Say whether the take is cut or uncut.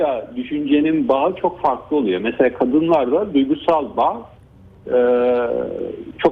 uncut